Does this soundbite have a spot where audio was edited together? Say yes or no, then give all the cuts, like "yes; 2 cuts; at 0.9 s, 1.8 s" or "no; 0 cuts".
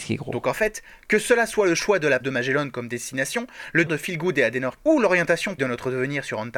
yes; 4 cuts; at 2.2 s, 3.9 s, 4.8 s, 5.6 s